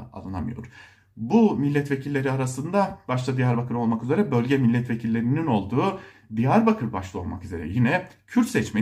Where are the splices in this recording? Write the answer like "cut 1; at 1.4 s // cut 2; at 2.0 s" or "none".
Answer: none